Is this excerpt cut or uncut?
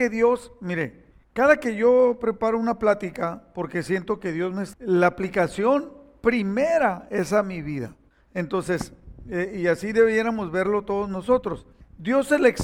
cut